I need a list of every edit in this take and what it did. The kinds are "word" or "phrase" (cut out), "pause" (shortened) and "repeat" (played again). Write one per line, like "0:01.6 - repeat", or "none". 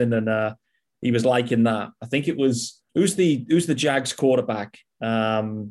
0:02.9 - pause